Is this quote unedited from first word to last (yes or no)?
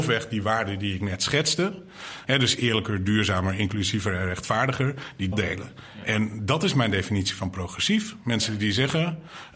no